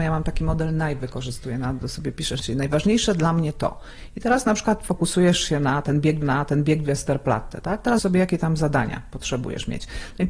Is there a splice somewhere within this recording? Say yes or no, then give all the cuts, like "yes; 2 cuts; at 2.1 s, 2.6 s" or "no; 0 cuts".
yes; 3 cuts; at 2.4 s, 6.2 s, 8.0 s